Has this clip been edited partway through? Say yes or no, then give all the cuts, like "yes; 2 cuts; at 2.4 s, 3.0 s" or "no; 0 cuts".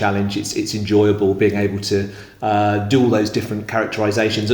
no; 0 cuts